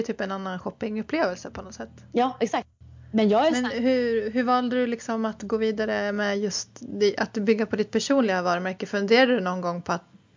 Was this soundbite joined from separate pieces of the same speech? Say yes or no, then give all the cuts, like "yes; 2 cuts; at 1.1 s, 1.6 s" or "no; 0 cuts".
no; 0 cuts